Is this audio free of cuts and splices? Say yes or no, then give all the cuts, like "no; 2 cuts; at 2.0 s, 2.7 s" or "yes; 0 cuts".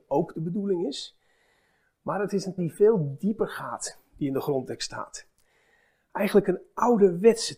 no; 1 cut; at 2.6 s